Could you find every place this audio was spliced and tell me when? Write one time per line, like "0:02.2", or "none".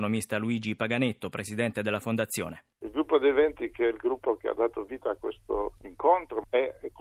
0:02.7